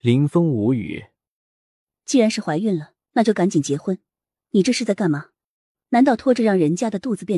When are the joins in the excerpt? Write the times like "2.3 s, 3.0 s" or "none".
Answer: 3.0 s